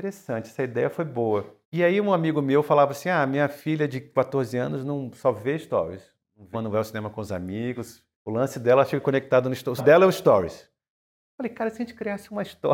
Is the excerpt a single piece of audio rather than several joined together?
no; 4 cuts; at 1.6 s, 6.5 s, 8.1 s, 9.8 s

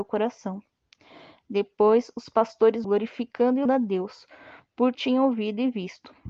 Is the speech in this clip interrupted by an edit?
yes; 3 cuts; at 2.8 s, 3.7 s, 4.9 s

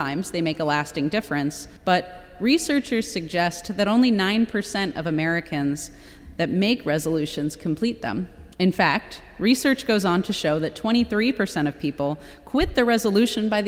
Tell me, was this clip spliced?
yes; 2 cuts; at 1.8 s, 8.5 s

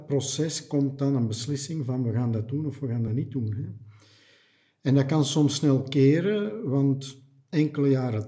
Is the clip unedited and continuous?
yes; 0 cuts

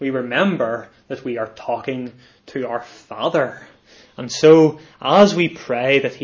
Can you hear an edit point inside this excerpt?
no; 0 cuts

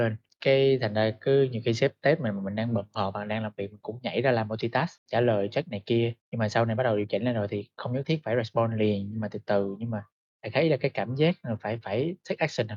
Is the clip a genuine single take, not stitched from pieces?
yes; 0 cuts

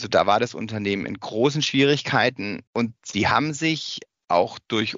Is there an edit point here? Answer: yes; 1 cut; at 2.7 s

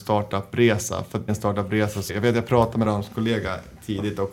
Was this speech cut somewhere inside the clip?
yes; 3 cuts; at 1.3 s, 2.1 s, 2.8 s

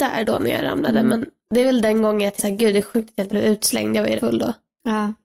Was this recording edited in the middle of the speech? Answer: yes; 3 cuts; at 2.4 s, 3.3 s, 4.2 s

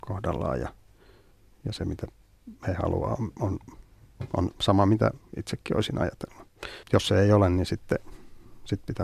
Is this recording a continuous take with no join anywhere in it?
no; 1 cut; at 6.8 s

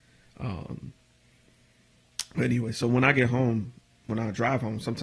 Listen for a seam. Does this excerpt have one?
no; 0 cuts

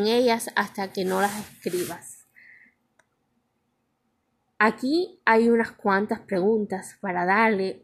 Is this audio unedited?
yes; 0 cuts

